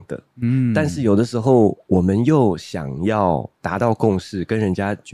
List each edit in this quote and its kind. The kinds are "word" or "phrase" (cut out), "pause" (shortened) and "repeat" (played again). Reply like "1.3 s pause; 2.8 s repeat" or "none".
3.5 s pause